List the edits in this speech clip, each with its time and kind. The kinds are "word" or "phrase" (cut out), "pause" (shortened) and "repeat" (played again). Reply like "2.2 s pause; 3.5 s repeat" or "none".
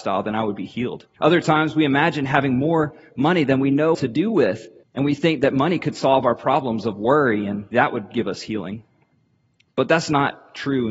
1.1 s pause; 3.9 s word; 4.8 s pause; 7.7 s word